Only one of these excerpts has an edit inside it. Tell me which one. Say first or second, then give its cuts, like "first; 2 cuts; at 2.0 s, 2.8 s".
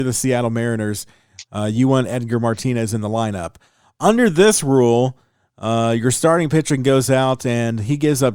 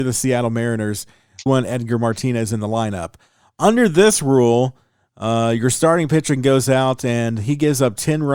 second; 1 cut; at 1.5 s